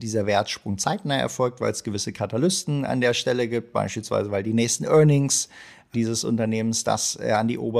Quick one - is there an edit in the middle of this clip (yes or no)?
no